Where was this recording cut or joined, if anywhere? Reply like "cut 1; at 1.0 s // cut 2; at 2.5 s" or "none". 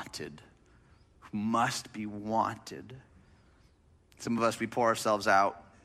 none